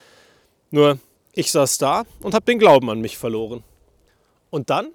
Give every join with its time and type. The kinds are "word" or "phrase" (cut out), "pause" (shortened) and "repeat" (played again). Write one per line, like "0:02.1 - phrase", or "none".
none

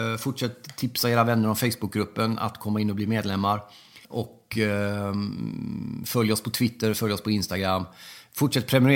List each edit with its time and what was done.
0:04.0 - pause

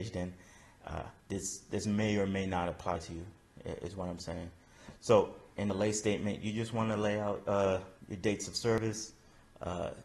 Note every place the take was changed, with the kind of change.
0:01.2 - pause
0:05.5 - pause
0:08.0 - pause

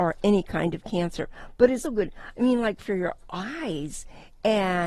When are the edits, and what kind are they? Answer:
0:01.8 - word

